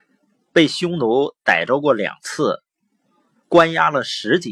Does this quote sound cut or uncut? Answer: uncut